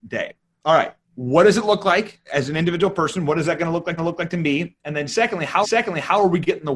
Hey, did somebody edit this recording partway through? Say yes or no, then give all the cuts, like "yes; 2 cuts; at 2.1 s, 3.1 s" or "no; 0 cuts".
yes; 4 cuts; at 1.0 s, 2.2 s, 4.0 s, 5.6 s